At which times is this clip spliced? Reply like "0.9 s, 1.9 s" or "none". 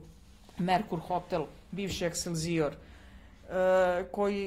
none